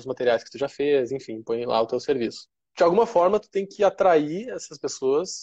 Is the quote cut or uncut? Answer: uncut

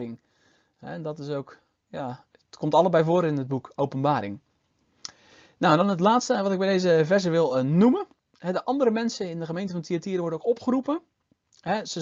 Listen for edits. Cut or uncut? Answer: uncut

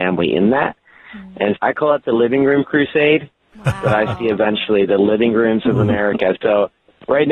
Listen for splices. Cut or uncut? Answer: cut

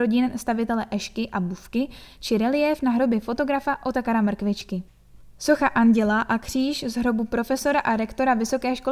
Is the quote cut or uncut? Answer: uncut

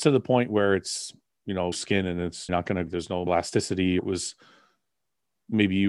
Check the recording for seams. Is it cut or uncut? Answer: cut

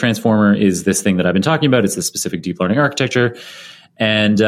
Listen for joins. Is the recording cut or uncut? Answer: uncut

